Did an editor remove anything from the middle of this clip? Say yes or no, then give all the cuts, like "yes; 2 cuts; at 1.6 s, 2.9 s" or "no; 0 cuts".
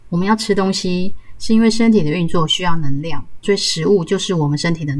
yes; 1 cut; at 3.4 s